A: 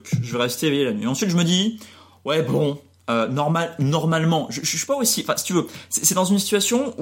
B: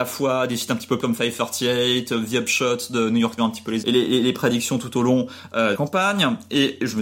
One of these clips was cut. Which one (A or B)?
B